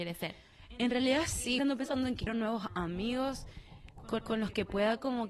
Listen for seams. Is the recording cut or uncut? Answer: cut